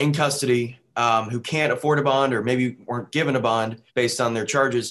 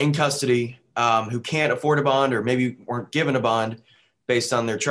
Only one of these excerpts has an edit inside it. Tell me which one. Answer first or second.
first